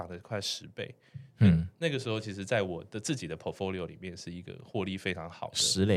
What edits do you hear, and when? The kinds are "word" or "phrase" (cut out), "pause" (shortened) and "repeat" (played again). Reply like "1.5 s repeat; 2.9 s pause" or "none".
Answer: none